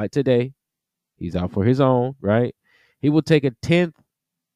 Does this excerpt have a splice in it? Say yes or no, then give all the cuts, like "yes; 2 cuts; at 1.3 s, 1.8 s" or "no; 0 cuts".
no; 0 cuts